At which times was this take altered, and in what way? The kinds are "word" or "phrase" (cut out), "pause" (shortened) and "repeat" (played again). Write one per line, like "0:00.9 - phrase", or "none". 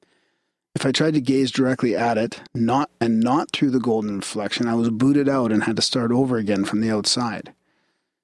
0:02.5 - pause